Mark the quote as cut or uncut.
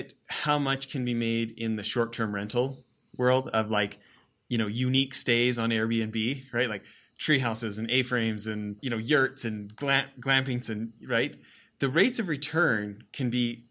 cut